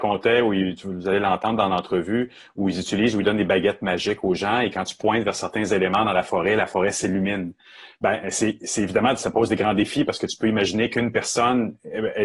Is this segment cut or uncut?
uncut